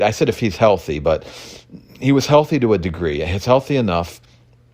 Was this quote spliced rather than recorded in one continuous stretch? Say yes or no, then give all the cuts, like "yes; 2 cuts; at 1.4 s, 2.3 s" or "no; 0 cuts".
no; 0 cuts